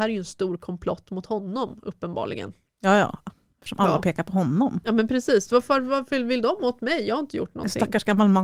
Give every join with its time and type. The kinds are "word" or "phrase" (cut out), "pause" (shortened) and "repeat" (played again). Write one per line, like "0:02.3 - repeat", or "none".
none